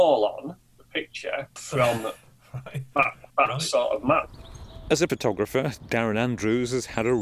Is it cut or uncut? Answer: cut